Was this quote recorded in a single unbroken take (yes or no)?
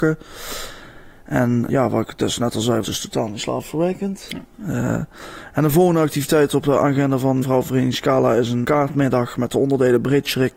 no